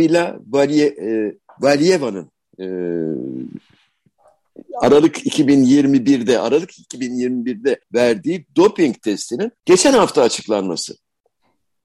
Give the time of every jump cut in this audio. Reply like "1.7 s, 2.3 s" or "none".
1.4 s, 7.8 s, 9.6 s

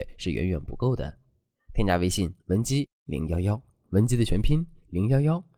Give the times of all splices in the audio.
2.4 s

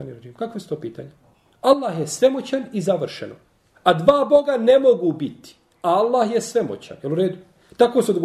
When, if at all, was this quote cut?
none

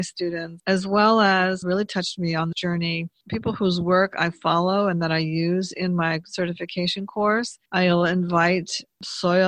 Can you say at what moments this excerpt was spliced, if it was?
1.6 s, 2.5 s, 7.7 s

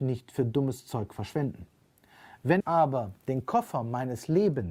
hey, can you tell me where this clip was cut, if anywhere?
2.6 s, 3.2 s

